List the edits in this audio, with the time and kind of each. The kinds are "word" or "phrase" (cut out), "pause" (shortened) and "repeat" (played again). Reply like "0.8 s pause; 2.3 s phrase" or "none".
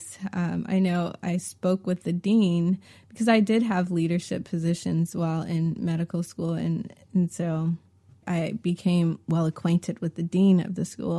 8.2 s word